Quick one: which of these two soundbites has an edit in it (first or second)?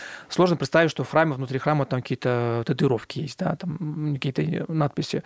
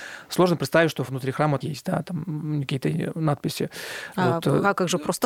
second